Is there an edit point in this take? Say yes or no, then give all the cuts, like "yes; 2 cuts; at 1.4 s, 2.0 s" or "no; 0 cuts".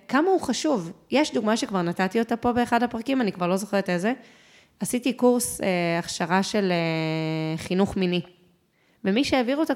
no; 0 cuts